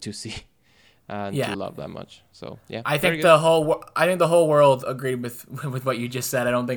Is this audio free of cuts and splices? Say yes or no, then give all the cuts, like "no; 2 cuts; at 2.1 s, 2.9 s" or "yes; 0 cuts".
no; 1 cut; at 1.5 s